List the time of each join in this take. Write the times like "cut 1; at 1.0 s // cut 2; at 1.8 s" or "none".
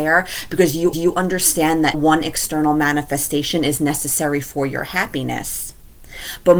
cut 1; at 0.9 s // cut 2; at 1.9 s